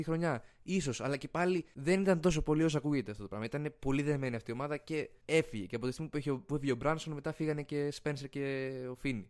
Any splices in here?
no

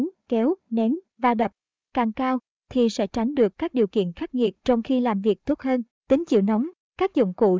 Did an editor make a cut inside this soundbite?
no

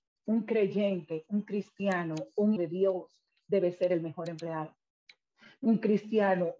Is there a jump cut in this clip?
yes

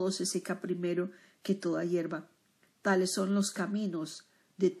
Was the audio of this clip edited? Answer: no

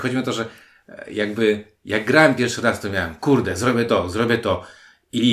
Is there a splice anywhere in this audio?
no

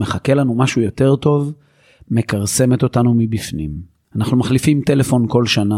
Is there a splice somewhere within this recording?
no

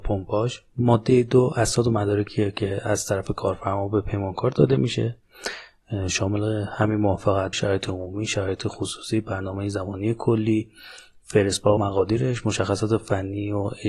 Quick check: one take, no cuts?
no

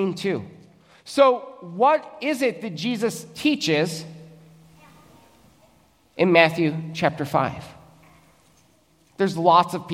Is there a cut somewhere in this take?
no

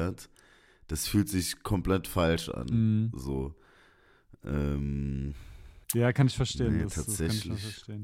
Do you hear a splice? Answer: yes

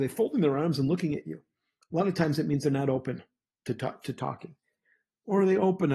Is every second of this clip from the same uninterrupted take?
yes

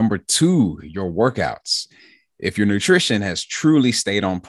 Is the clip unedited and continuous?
yes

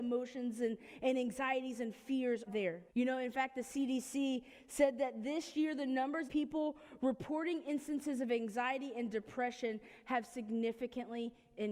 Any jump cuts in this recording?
yes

